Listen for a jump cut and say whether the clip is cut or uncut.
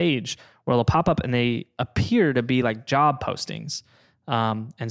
uncut